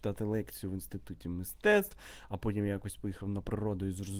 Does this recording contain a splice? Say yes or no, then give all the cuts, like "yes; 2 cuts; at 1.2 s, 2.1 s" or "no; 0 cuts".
no; 0 cuts